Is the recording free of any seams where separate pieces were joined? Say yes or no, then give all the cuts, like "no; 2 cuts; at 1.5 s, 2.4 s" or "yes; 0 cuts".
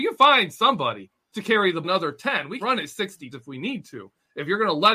no; 4 cuts; at 1.3 s, 1.8 s, 2.6 s, 3.3 s